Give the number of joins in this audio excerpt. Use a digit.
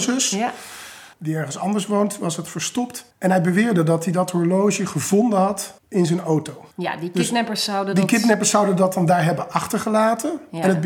4